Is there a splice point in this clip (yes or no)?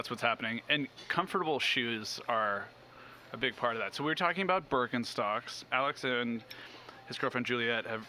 yes